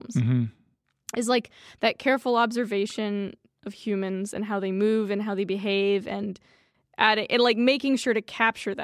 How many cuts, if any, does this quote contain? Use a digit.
0